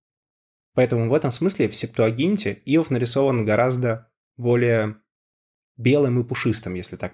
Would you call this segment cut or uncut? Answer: uncut